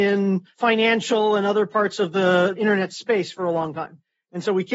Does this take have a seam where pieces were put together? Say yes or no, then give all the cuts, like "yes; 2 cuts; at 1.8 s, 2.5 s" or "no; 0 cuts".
no; 0 cuts